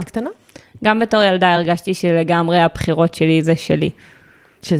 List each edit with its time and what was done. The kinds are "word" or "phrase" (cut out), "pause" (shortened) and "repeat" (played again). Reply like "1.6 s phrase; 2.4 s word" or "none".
none